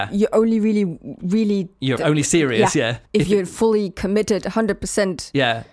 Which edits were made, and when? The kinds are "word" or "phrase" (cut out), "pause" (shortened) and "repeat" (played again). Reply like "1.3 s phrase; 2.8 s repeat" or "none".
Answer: 2.0 s word; 3.1 s pause